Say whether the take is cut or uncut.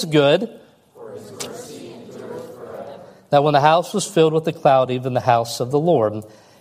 uncut